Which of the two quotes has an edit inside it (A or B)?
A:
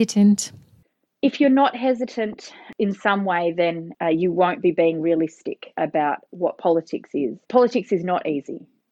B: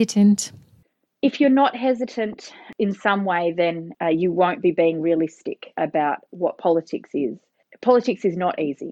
A